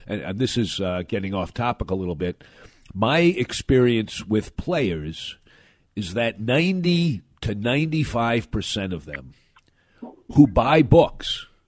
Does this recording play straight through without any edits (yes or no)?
yes